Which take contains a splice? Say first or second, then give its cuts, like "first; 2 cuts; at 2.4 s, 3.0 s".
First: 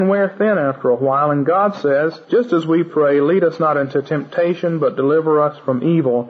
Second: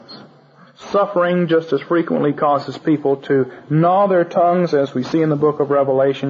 first; 1 cut; at 2.2 s